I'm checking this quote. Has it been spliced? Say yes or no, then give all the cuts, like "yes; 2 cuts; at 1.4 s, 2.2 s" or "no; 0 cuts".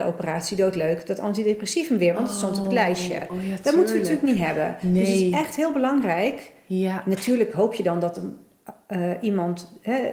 no; 0 cuts